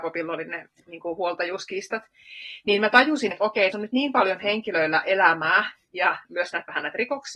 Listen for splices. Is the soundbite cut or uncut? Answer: cut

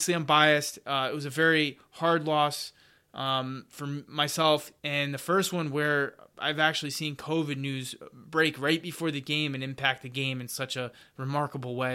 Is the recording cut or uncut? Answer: cut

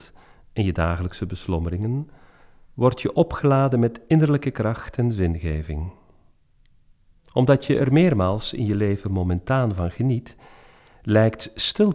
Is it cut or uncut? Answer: uncut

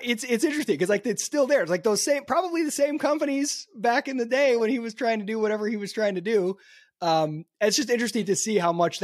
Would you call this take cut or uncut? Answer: uncut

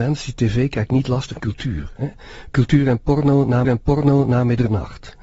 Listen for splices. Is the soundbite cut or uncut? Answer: cut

